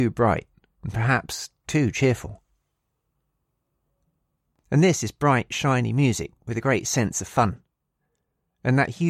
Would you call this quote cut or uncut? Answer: uncut